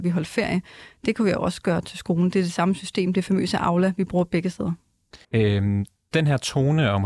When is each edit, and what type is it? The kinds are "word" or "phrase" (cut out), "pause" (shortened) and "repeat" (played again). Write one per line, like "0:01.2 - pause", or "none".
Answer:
0:05.2 - pause